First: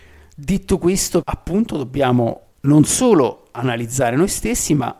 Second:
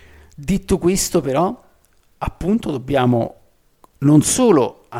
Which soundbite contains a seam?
first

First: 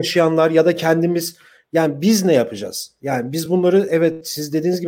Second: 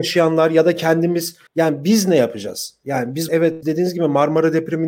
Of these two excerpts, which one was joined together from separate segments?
second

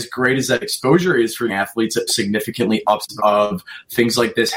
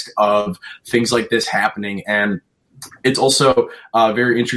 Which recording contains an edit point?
first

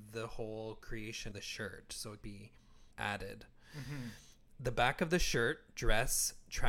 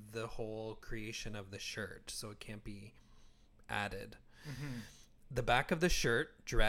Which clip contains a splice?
first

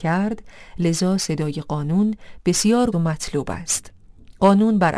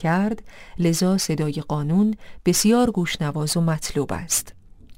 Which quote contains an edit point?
first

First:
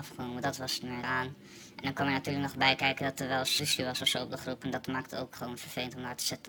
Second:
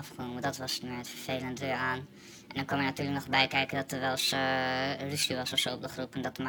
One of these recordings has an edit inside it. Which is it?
first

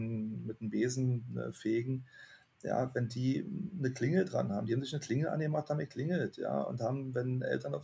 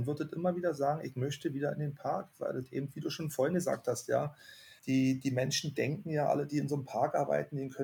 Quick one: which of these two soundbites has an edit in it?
second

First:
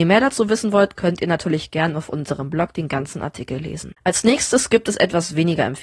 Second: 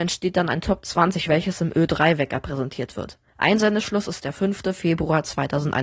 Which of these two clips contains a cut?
second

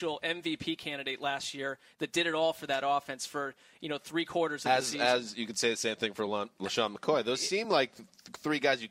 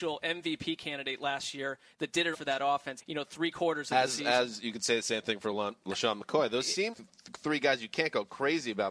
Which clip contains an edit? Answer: second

